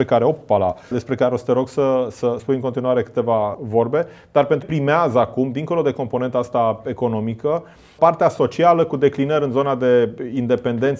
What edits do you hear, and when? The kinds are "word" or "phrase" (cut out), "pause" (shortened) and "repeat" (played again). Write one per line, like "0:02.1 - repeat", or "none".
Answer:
0:00.9 - word
0:02.4 - word
0:03.5 - word
0:04.6 - word
0:08.0 - word